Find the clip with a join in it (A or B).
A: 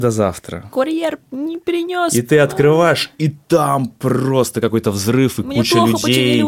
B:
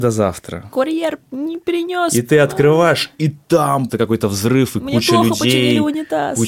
B